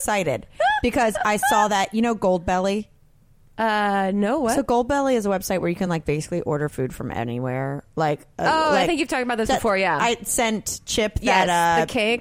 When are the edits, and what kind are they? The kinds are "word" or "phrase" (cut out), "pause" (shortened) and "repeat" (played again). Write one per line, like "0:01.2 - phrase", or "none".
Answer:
none

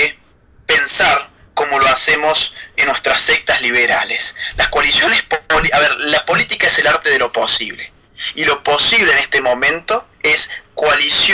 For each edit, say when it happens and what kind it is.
0:10.1 - pause

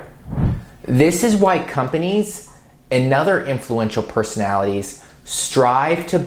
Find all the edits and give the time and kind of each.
none

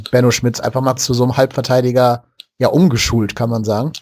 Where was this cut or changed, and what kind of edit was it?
0:01.0 - word

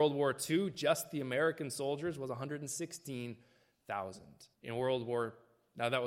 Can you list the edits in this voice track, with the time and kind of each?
0:04.5 - pause

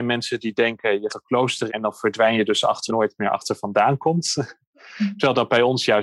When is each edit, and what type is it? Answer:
0:01.1 - word
0:01.7 - word
0:02.9 - phrase

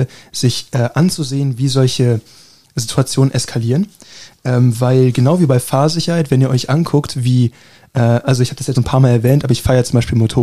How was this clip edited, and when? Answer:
0:08.7 - word

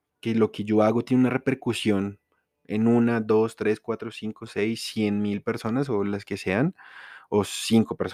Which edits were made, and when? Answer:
none

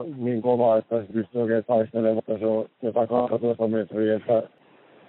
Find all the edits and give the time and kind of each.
0:01.1 - word
0:02.2 - word
0:02.7 - pause

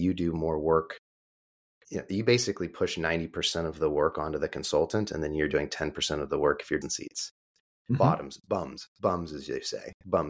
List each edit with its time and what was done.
0:06.8 - phrase

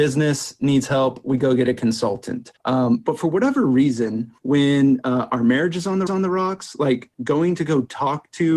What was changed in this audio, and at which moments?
0:02.6 - pause
0:04.4 - pause
0:06.1 - repeat
0:07.1 - pause

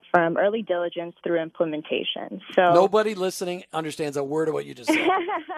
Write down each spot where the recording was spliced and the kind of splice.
none

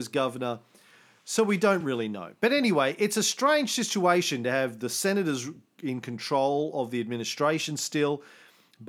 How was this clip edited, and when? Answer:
none

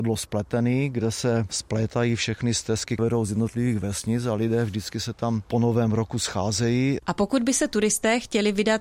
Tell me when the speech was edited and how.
0:03.0 - word

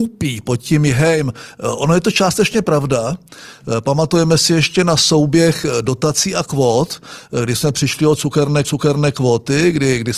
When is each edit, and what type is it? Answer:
0:08.6 - repeat

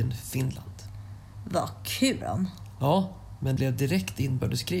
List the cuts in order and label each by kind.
0:02.2 - word
0:03.6 - word

